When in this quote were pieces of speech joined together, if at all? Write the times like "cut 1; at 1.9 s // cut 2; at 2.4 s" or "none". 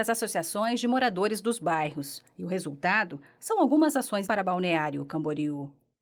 cut 1; at 4.2 s